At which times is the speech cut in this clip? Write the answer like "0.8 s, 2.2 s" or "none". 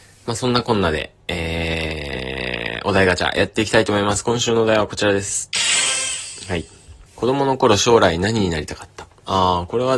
7.1 s